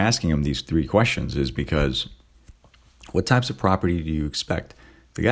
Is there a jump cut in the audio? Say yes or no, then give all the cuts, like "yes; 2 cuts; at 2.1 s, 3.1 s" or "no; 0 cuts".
no; 0 cuts